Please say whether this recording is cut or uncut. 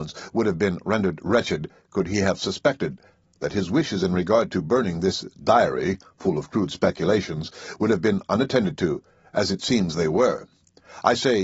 uncut